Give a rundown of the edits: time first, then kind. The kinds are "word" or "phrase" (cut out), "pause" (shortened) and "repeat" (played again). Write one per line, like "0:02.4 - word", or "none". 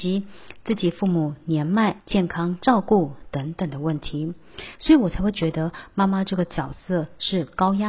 0:02.0 - pause